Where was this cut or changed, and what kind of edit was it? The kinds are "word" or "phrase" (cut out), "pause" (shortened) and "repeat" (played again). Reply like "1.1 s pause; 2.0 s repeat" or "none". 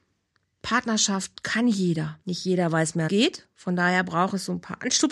2.2 s pause; 3.1 s phrase